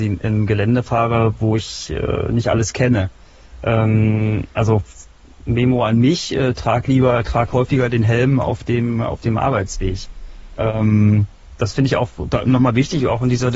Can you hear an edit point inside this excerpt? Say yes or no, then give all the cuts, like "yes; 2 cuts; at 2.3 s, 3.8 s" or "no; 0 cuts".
no; 0 cuts